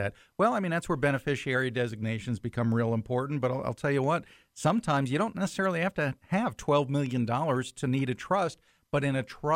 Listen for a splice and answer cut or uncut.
uncut